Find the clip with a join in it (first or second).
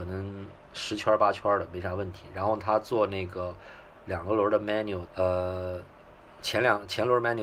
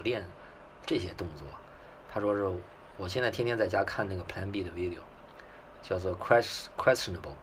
first